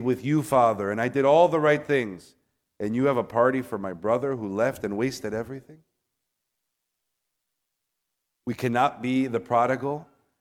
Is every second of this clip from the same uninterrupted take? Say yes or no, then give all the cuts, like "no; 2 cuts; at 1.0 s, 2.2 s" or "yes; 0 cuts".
yes; 0 cuts